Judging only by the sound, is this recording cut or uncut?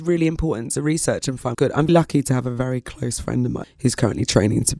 cut